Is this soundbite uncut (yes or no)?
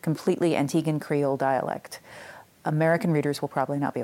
yes